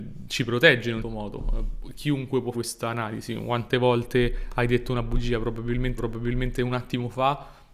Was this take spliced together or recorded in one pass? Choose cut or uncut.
cut